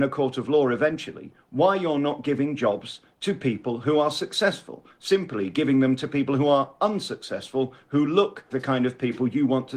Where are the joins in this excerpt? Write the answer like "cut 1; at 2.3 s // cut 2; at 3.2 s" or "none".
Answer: cut 1; at 8.5 s